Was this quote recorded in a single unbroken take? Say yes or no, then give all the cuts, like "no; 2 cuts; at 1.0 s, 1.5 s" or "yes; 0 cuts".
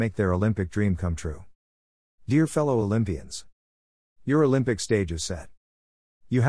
yes; 0 cuts